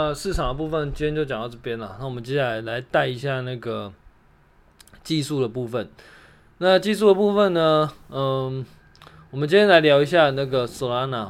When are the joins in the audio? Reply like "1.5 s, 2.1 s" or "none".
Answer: none